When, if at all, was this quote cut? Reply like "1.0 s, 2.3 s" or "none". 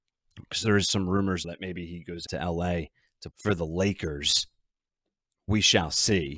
1.4 s, 2.3 s, 3.3 s